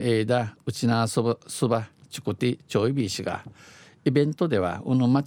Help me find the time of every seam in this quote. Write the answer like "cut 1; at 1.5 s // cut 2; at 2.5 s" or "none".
none

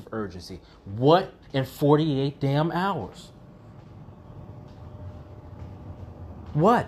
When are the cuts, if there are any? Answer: cut 1; at 1.4 s

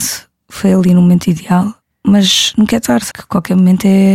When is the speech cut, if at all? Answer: cut 1; at 1.8 s // cut 2; at 3.1 s

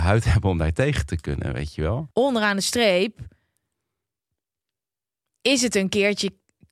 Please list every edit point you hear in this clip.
none

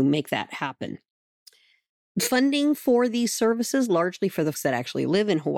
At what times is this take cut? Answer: cut 1; at 4.5 s

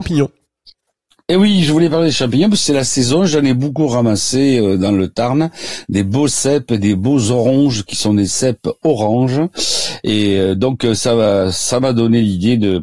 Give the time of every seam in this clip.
none

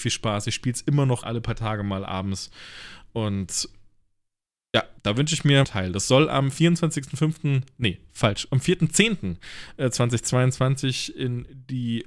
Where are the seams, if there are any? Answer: cut 1; at 1.2 s // cut 2; at 5.0 s // cut 3; at 5.6 s

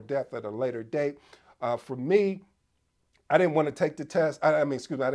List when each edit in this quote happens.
none

